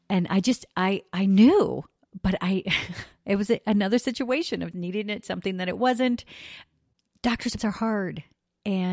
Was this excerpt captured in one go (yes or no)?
no